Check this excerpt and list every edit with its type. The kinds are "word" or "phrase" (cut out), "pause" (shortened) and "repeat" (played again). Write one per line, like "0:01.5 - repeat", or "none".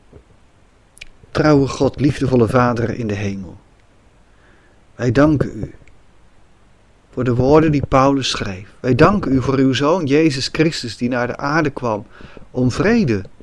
none